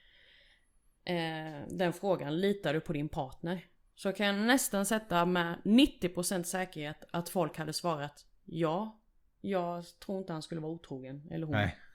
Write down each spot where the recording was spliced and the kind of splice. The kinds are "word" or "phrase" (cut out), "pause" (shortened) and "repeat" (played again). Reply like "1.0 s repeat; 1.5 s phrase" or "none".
none